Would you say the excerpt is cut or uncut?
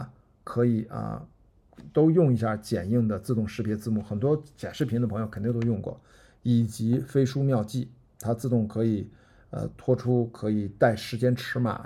uncut